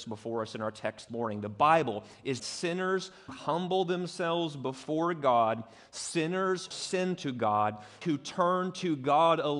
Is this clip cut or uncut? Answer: cut